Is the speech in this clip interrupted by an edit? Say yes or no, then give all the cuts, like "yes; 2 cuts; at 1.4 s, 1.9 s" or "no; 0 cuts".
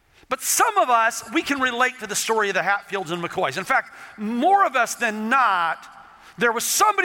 no; 0 cuts